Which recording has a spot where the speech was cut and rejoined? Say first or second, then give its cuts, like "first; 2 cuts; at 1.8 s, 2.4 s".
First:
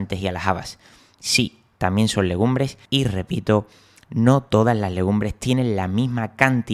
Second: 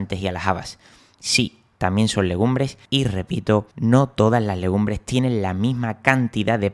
second; 1 cut; at 3.7 s